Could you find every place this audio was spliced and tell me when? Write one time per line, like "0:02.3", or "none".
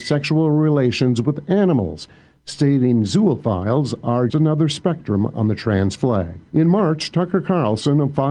0:04.3